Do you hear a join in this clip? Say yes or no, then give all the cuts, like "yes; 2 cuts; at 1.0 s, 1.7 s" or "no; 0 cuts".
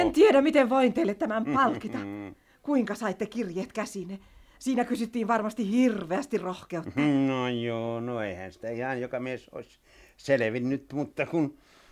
no; 0 cuts